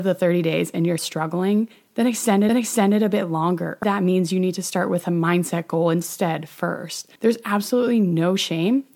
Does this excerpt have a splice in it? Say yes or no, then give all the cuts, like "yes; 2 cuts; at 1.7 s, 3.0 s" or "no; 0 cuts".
yes; 4 cuts; at 1.0 s, 2.5 s, 3.8 s, 7.2 s